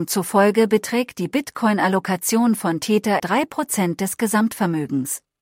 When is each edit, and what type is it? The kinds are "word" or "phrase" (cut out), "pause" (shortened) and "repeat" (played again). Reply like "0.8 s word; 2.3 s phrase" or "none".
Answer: 3.2 s word